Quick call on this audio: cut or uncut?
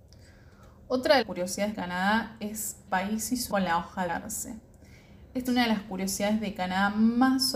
cut